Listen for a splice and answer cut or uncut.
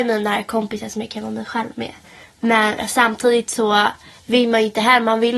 uncut